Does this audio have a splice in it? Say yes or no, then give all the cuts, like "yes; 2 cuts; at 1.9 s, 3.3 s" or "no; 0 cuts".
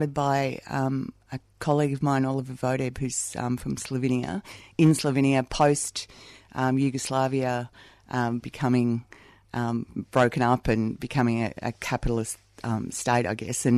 yes; 1 cut; at 8.4 s